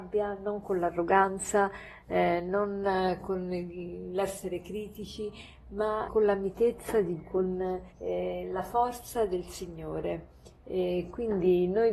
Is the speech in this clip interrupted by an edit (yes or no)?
yes